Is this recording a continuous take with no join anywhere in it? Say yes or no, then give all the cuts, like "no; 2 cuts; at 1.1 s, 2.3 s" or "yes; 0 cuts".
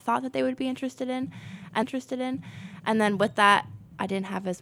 no; 1 cut; at 1.8 s